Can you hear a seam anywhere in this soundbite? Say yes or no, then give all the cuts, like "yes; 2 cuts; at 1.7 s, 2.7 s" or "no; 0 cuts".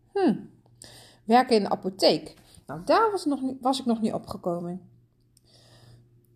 no; 0 cuts